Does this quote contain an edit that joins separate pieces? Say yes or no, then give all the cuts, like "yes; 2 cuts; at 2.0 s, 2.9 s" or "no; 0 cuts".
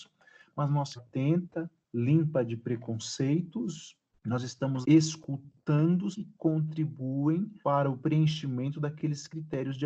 yes; 6 cuts; at 1.0 s, 1.8 s, 4.2 s, 4.8 s, 6.1 s, 7.6 s